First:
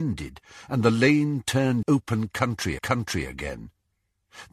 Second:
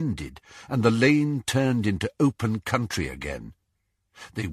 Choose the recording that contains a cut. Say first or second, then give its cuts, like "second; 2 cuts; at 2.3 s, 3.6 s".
first; 2 cuts; at 1.8 s, 2.8 s